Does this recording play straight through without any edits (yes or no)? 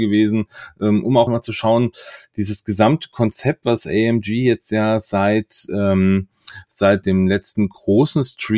no